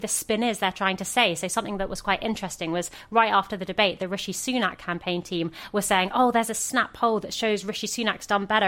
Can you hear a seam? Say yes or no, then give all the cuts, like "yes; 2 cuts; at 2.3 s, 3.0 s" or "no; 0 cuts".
no; 0 cuts